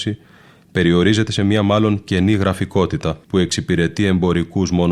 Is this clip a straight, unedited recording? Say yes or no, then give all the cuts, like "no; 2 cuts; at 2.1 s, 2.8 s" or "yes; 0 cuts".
no; 1 cut; at 3.2 s